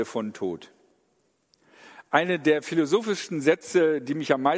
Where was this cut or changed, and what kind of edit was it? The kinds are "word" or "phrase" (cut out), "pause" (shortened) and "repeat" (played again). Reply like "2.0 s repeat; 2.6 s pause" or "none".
none